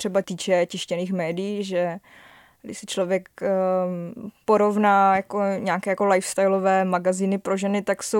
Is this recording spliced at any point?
no; 0 cuts

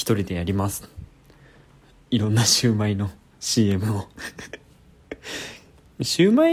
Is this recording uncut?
yes; 0 cuts

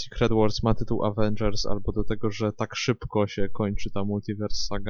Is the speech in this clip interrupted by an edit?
no; 0 cuts

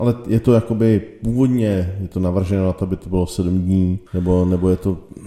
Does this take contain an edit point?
yes; 1 cut; at 4.1 s

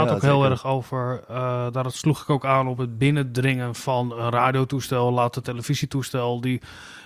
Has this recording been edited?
no; 0 cuts

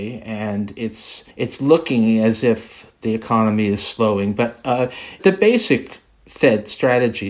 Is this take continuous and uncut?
no; 1 cut; at 1.3 s

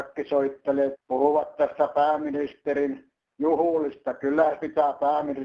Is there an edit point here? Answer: yes; 2 cuts; at 0.9 s, 4.6 s

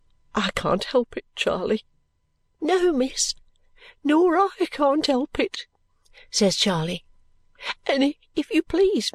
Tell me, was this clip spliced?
no; 0 cuts

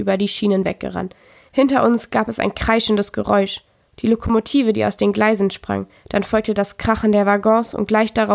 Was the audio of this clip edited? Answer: no; 0 cuts

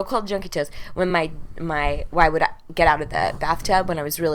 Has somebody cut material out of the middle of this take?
no; 0 cuts

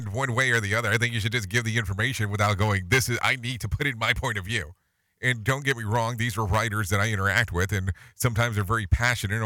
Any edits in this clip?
no; 0 cuts

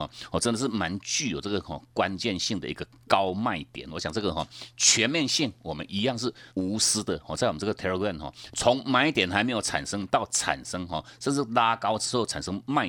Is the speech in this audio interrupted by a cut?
yes; 1 cut; at 6.5 s

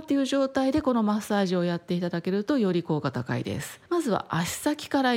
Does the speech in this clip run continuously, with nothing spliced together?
no; 1 cut; at 3.9 s

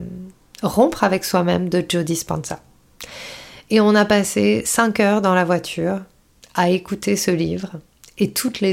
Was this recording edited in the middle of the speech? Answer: no; 0 cuts

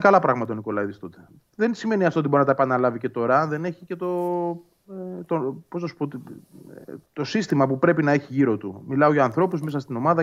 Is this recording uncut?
no; 1 cut; at 7.1 s

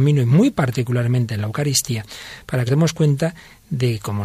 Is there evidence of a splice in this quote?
yes; 1 cut; at 2.7 s

